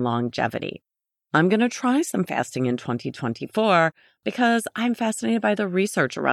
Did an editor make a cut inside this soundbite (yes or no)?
no